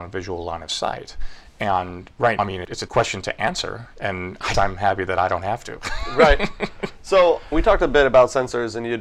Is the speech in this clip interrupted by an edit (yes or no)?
yes